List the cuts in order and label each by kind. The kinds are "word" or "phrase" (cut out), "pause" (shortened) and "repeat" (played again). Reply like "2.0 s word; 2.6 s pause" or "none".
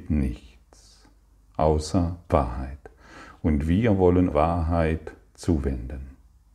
2.3 s word; 4.3 s phrase